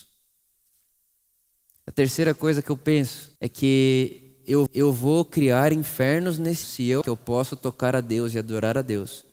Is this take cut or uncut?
cut